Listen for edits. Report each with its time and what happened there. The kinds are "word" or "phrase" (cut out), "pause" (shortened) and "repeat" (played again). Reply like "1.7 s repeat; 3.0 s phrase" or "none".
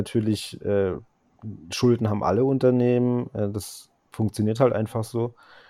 none